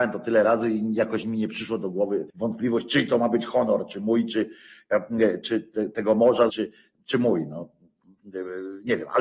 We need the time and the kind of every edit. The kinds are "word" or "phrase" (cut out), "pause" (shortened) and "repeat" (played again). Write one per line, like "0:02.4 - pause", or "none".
0:02.3 - pause
0:05.4 - word
0:06.5 - word